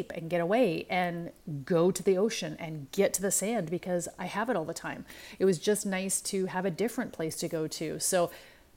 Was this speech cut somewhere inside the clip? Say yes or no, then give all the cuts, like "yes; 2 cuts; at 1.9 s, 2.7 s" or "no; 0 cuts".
no; 0 cuts